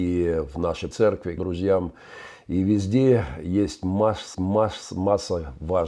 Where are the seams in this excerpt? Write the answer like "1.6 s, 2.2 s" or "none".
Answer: 0.9 s, 1.4 s, 4.3 s